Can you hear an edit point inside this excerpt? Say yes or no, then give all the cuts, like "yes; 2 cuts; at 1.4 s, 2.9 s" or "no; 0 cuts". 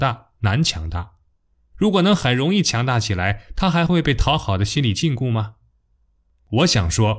no; 0 cuts